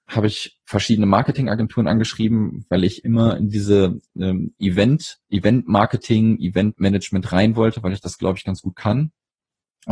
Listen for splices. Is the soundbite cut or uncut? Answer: cut